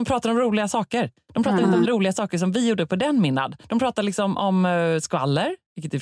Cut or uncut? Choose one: cut